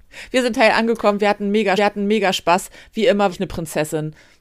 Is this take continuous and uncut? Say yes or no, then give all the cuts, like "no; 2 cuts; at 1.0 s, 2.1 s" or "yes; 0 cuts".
no; 2 cuts; at 1.8 s, 3.3 s